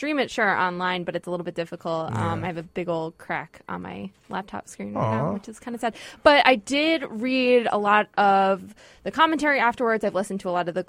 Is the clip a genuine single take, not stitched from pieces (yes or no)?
yes